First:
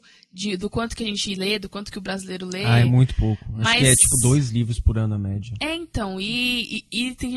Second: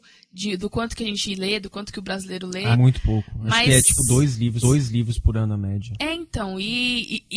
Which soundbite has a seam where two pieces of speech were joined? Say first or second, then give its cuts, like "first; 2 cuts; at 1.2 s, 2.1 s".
second; 2 cuts; at 2.7 s, 4.6 s